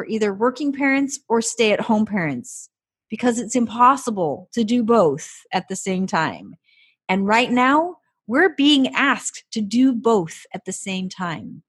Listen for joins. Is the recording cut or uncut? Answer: uncut